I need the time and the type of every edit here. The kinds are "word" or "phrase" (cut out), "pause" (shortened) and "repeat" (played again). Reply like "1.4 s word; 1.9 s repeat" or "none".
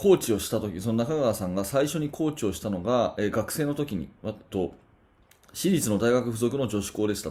4.5 s phrase